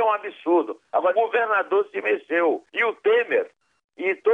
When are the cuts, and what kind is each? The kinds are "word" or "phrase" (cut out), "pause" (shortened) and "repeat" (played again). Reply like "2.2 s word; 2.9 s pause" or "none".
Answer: 1.1 s word; 2.7 s pause